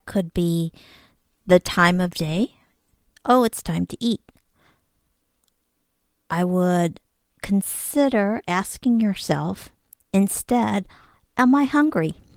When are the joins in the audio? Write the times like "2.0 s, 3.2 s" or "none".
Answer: none